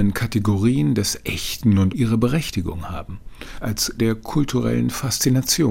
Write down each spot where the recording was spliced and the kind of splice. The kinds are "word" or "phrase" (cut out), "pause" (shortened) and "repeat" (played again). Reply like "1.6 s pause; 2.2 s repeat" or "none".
1.9 s word; 4.0 s word